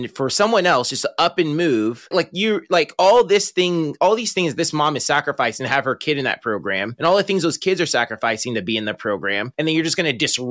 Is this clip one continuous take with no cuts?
no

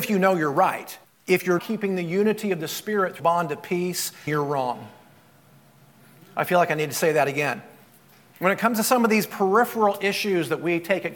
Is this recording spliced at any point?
yes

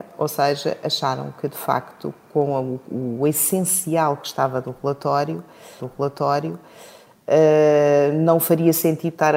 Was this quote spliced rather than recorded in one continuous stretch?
yes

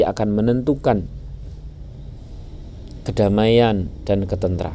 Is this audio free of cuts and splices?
yes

